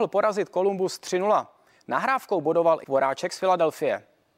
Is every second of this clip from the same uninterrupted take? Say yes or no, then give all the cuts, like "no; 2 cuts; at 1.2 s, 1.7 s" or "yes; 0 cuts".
no; 1 cut; at 2.8 s